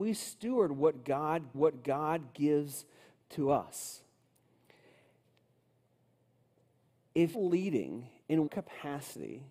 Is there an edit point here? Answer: yes; 3 cuts; at 1.5 s, 7.3 s, 8.5 s

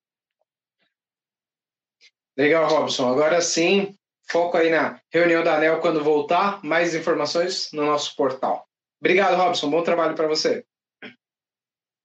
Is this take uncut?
yes; 0 cuts

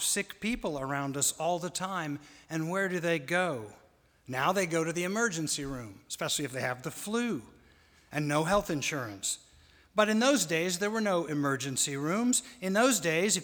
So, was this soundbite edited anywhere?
no; 0 cuts

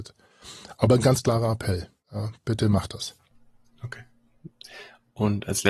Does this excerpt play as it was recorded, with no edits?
yes; 0 cuts

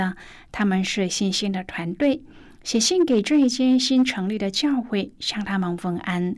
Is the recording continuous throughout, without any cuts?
yes; 0 cuts

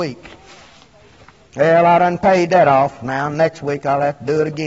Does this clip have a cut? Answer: no; 0 cuts

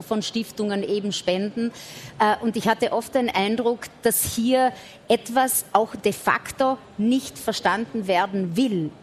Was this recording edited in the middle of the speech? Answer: no; 0 cuts

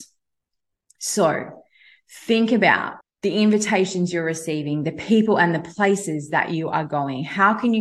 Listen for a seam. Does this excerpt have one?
yes; 1 cut; at 3.0 s

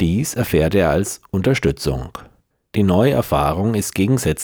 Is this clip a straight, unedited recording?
no; 1 cut; at 2.5 s

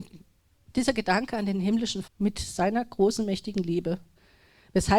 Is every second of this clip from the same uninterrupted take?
no; 1 cut; at 2.0 s

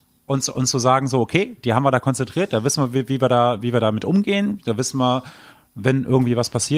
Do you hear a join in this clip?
no; 0 cuts

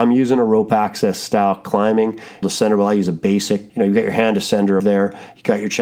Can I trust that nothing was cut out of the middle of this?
no; 3 cuts; at 2.4 s, 3.7 s, 4.8 s

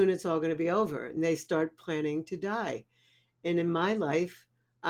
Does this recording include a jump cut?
no; 0 cuts

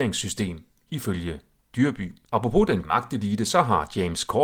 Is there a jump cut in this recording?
yes; 2 cuts; at 2.2 s, 2.8 s

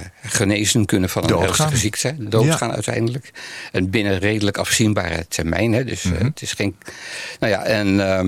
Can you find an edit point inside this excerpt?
no; 0 cuts

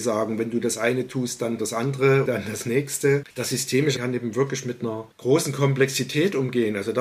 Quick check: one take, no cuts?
no; 5 cuts; at 1.6 s, 2.3 s, 3.3 s, 4.0 s, 5.1 s

